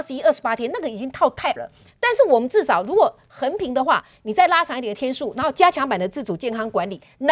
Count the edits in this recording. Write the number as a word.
one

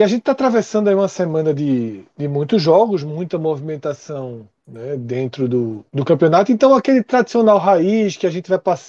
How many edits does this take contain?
one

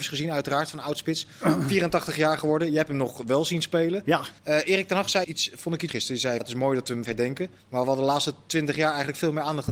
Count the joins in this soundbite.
six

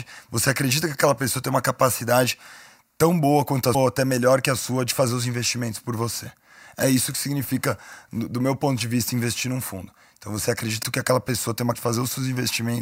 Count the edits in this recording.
three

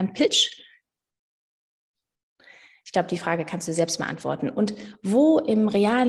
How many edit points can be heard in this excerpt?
zero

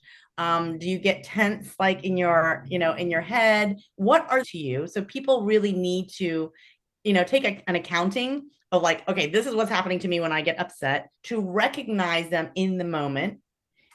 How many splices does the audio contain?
two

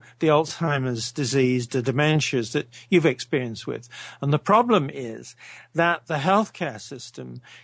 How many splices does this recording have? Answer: zero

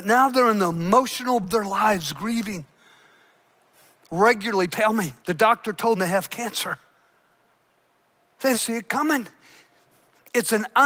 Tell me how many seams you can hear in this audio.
five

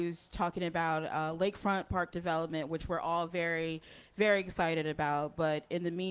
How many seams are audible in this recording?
zero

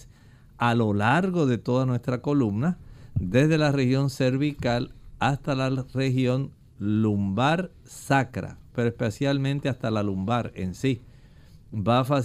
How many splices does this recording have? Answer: zero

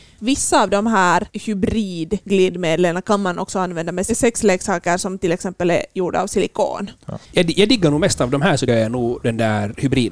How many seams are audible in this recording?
two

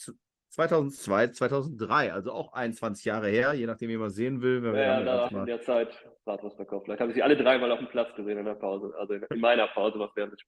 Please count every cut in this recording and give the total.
one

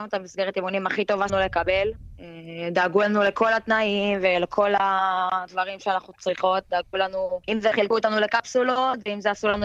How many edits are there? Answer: two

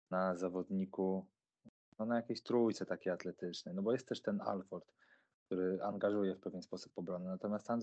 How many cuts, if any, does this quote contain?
zero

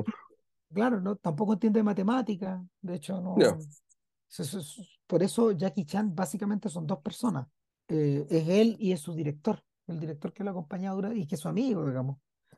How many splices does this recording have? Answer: one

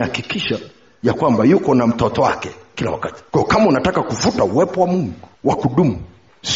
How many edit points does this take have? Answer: two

